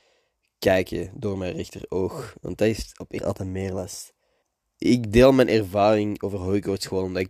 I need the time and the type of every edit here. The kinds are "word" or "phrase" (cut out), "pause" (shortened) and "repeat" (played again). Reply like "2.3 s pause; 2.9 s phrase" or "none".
3.2 s phrase; 4.4 s pause